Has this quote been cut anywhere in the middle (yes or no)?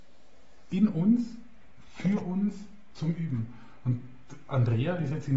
no